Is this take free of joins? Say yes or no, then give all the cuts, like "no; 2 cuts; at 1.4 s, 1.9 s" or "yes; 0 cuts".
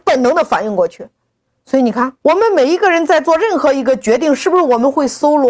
no; 2 cuts; at 1.3 s, 2.2 s